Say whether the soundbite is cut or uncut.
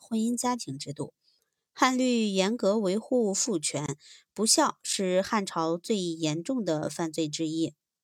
uncut